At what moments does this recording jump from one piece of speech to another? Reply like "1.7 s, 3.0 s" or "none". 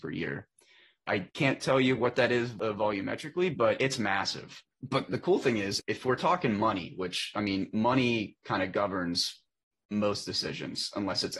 none

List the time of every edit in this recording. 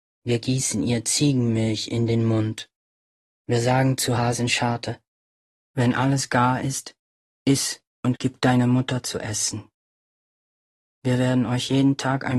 none

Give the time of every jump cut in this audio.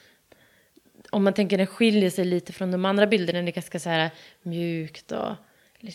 none

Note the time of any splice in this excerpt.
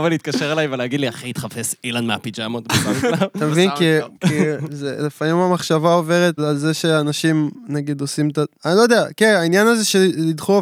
4.1 s, 6.4 s, 8.5 s

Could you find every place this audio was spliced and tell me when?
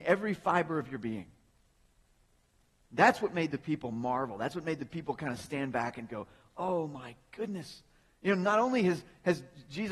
none

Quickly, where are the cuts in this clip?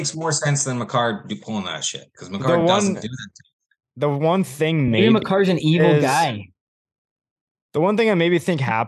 none

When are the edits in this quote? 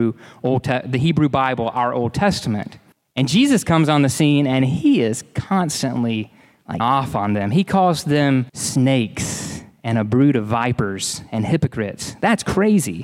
2.9 s, 6.8 s, 8.5 s

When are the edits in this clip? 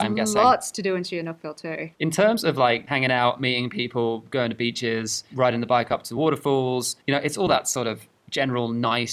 1.9 s, 7.0 s

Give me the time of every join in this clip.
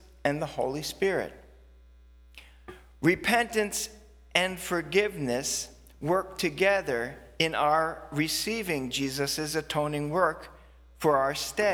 none

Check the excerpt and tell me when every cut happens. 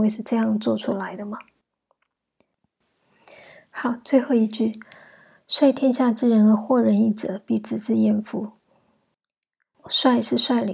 none

